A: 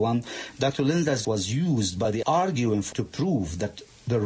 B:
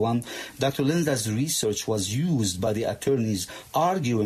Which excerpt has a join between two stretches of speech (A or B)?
A